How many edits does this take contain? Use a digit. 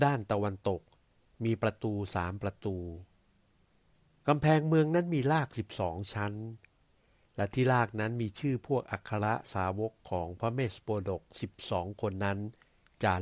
0